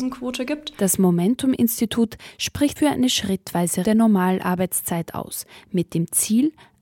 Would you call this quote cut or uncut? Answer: cut